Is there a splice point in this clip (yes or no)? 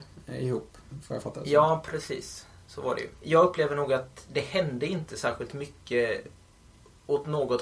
no